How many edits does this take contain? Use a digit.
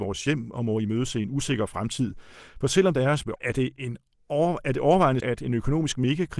3